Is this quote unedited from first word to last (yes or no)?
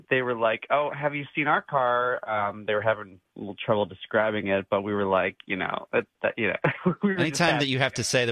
yes